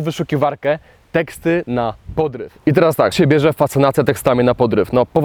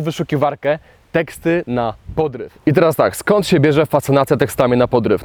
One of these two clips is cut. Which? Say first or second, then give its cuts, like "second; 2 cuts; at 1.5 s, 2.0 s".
first; 1 cut; at 3.1 s